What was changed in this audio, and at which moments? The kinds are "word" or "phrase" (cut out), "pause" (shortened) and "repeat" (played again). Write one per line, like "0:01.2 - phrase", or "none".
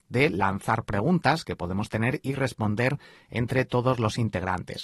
none